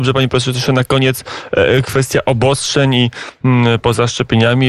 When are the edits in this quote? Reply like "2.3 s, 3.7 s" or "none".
none

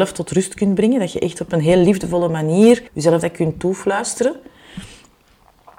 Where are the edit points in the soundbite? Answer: 2.9 s

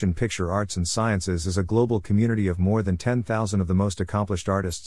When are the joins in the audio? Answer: none

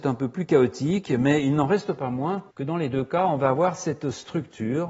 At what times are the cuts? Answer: 2.5 s

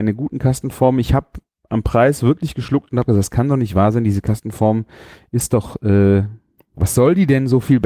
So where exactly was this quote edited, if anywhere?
none

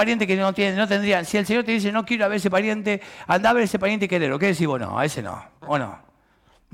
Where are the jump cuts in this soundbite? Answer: none

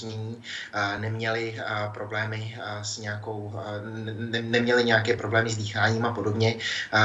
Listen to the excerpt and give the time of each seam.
none

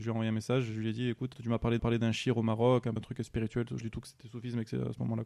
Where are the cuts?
1.3 s, 1.8 s, 3.0 s, 3.8 s

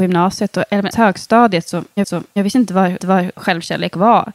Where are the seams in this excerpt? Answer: 0.9 s, 2.0 s, 3.0 s

